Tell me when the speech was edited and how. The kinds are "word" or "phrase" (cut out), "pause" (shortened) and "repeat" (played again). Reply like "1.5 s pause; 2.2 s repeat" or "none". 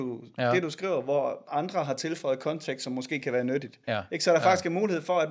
1.5 s phrase; 3.8 s pause

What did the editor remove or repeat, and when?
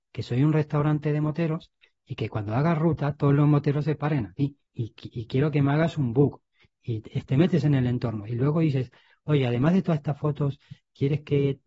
4.7 s pause

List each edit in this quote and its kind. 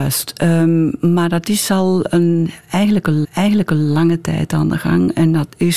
3.2 s repeat

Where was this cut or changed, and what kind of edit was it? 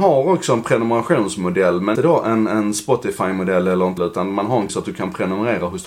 1.9 s word; 4.0 s word; 4.7 s word

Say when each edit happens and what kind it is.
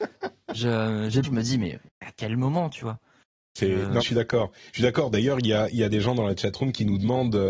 1.2 s phrase; 1.9 s pause; 4.0 s word

